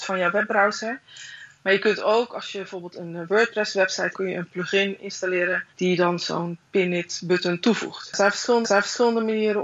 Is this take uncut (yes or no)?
no